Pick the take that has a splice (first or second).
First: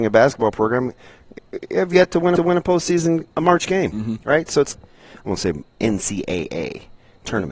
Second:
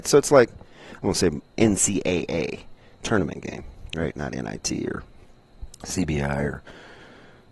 first